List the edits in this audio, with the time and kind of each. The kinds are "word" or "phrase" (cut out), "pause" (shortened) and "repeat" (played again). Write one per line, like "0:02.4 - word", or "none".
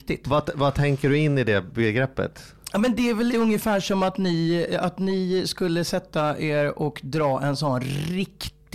0:03.3 - word